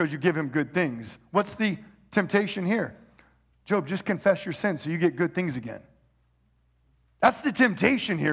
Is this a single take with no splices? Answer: yes; 0 cuts

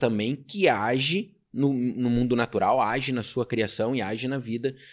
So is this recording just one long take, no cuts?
yes; 0 cuts

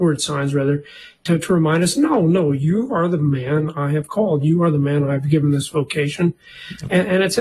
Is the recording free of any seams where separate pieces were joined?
yes; 0 cuts

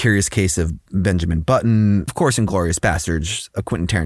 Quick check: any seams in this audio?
yes; 1 cut; at 2.1 s

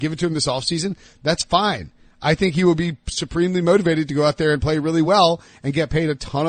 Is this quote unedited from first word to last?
yes; 0 cuts

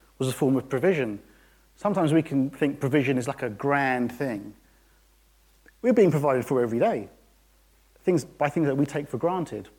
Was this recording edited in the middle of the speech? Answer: no; 0 cuts

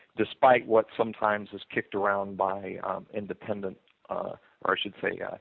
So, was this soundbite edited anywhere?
no; 0 cuts

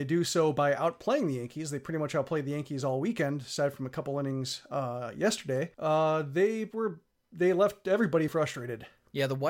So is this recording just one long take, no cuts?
no; 2 cuts; at 5.7 s, 8.3 s

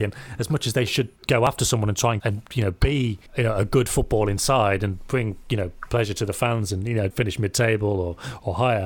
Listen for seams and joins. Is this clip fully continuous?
no; 4 cuts; at 1.2 s, 2.2 s, 3.3 s, 7.1 s

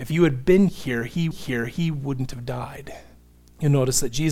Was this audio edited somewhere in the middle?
yes; 2 cuts; at 1.3 s, 3.3 s

